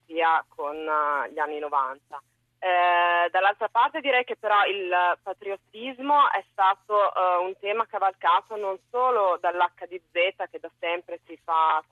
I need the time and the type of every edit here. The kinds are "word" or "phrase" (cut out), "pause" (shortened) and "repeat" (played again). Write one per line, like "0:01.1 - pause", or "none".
0:02.3 - pause